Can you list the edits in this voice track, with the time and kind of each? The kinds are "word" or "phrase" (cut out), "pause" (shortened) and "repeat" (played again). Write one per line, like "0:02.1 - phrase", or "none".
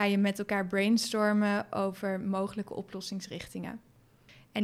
none